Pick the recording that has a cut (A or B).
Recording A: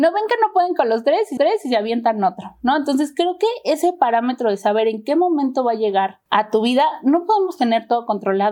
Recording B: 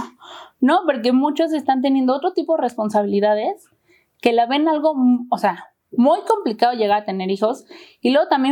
A